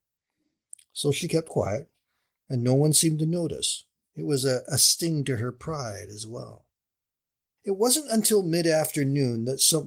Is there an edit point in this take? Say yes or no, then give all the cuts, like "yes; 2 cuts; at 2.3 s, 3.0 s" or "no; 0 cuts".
no; 0 cuts